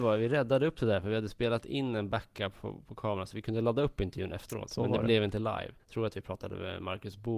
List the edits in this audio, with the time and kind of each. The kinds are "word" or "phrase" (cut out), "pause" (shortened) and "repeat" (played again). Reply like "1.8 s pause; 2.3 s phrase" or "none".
5.8 s pause